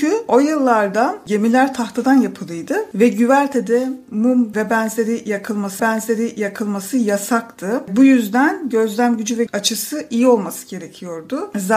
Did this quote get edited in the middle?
yes; 3 cuts; at 4.5 s, 5.8 s, 9.5 s

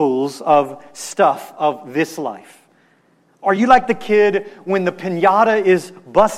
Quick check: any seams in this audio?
no; 0 cuts

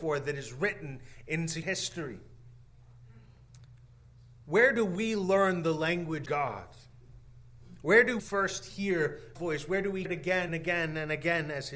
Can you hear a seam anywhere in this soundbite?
yes; 6 cuts; at 1.6 s, 6.3 s, 8.2 s, 9.4 s, 10.1 s, 10.5 s

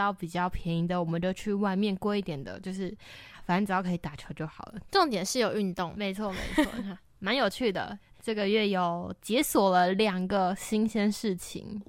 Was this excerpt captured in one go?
yes; 0 cuts

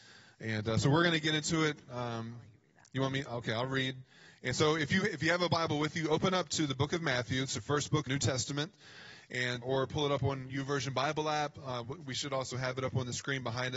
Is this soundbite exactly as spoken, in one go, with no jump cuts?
no; 3 cuts; at 8.1 s, 9.6 s, 10.5 s

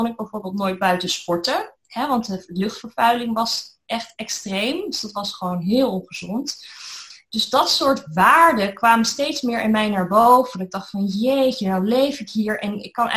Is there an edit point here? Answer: no; 0 cuts

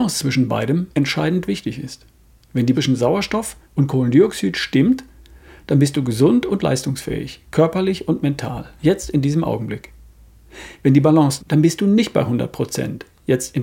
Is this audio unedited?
no; 5 cuts; at 0.9 s, 2.7 s, 3.6 s, 8.8 s, 11.4 s

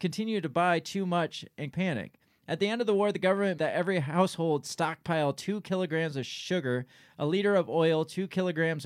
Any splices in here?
yes; 2 cuts; at 1.7 s, 3.6 s

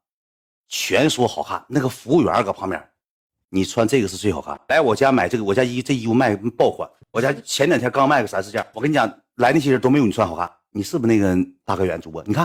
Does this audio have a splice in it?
no; 0 cuts

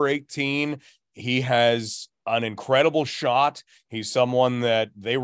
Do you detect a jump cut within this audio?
no; 0 cuts

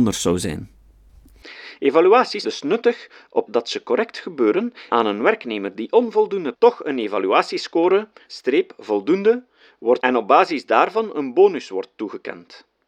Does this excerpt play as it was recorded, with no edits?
no; 6 cuts; at 2.4 s, 3.5 s, 4.9 s, 6.5 s, 8.3 s, 10.0 s

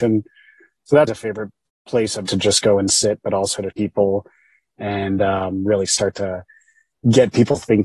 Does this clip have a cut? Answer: yes; 3 cuts; at 1.1 s, 2.3 s, 3.7 s

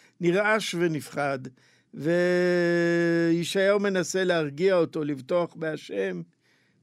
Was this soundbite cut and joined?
no; 0 cuts

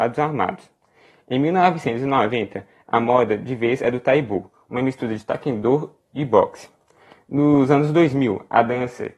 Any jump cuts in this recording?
no; 0 cuts

